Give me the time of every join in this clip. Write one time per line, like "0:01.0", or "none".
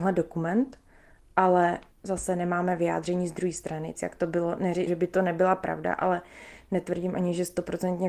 0:01.9
0:03.9
0:04.9